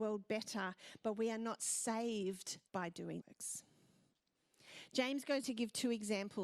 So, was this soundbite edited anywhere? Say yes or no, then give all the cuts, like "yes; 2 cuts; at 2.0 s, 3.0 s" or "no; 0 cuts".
yes; 3 cuts; at 2.7 s, 3.2 s, 5.4 s